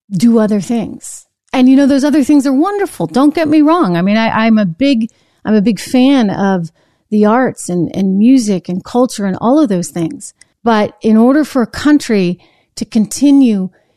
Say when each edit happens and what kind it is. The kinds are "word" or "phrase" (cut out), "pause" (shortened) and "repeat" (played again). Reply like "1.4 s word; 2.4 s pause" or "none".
10.5 s pause